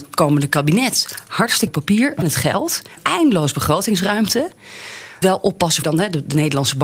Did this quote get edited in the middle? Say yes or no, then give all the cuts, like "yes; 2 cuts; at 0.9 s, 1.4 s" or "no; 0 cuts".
yes; 5 cuts; at 1.7 s, 2.2 s, 3.0 s, 5.2 s, 5.8 s